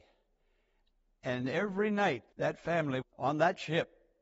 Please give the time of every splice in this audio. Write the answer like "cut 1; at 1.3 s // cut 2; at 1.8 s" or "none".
cut 1; at 2.3 s // cut 2; at 3.0 s